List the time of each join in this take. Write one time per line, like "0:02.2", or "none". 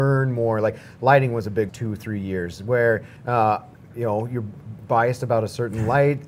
0:01.7
0:03.2